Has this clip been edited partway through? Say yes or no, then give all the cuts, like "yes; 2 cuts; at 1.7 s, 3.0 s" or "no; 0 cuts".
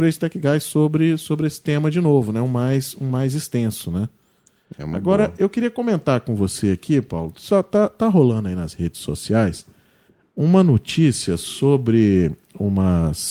no; 0 cuts